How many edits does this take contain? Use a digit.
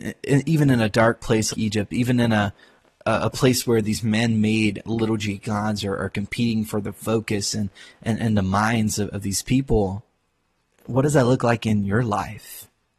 2